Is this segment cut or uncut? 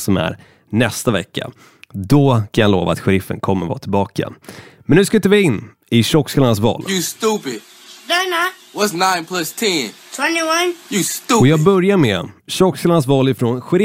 uncut